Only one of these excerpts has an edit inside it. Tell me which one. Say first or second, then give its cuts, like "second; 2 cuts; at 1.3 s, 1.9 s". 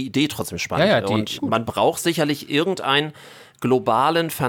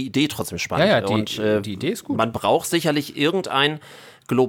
first; 1 cut; at 1.4 s